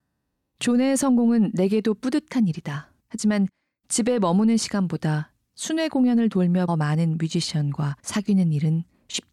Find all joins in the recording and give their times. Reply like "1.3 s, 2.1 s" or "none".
3.0 s, 6.7 s, 8.0 s